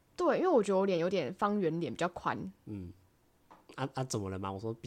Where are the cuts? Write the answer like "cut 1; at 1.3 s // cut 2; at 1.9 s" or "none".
cut 1; at 2.6 s